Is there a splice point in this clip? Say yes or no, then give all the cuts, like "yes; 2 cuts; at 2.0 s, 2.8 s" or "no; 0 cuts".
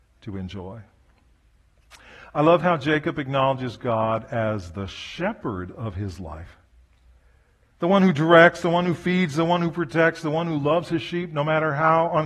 no; 0 cuts